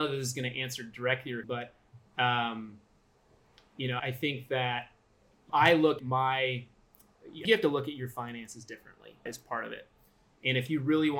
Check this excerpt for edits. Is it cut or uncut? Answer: cut